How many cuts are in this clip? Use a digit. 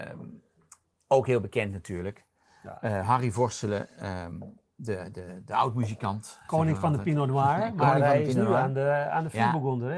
0